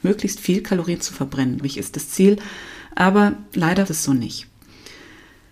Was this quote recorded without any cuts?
no; 2 cuts; at 1.6 s, 3.9 s

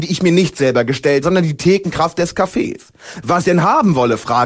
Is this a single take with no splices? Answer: no; 2 cuts; at 1.2 s, 3.4 s

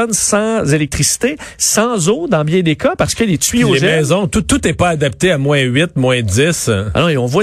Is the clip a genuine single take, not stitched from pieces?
yes; 0 cuts

